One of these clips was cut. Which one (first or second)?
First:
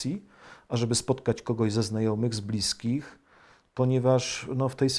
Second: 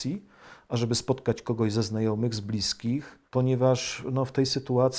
second